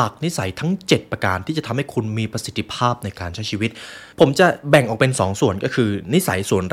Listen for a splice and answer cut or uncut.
cut